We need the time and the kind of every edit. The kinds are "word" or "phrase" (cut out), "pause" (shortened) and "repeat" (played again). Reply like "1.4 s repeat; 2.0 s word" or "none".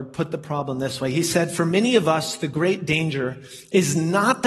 none